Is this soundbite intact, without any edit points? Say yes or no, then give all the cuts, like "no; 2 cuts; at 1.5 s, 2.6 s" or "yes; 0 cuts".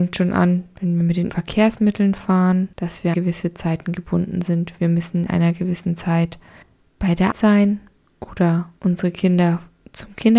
no; 7 cuts; at 1.3 s, 2.7 s, 3.1 s, 5.3 s, 6.6 s, 7.3 s, 8.8 s